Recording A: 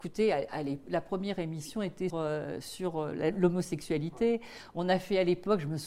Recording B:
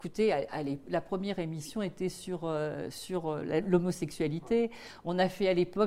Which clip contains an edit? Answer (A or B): A